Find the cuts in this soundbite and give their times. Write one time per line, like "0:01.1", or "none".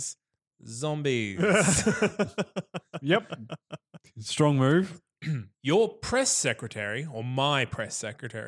0:05.5